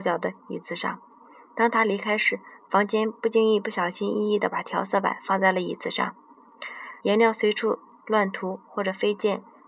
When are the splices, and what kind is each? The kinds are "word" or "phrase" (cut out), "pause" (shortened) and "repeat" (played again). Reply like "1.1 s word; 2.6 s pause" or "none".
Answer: 7.0 s pause